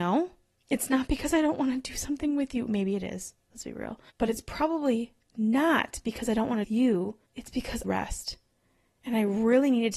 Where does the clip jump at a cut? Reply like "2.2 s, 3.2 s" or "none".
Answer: 4.1 s, 6.6 s, 7.2 s, 7.8 s